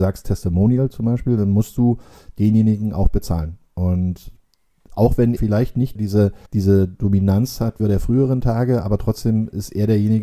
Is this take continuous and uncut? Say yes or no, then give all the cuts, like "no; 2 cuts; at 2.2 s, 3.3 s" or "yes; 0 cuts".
no; 4 cuts; at 5.4 s, 5.9 s, 6.5 s, 7.8 s